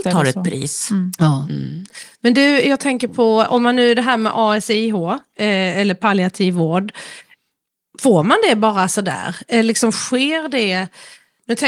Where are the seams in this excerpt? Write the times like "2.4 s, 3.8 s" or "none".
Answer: none